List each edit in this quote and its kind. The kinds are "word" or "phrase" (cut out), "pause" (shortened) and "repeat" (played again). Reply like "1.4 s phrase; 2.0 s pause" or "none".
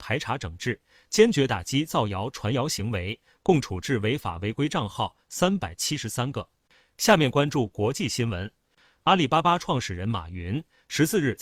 none